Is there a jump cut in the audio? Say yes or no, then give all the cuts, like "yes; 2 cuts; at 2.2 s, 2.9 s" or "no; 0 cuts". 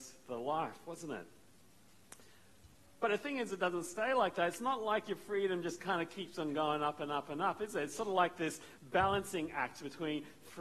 no; 0 cuts